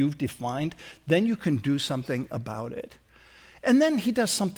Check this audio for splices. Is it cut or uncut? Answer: uncut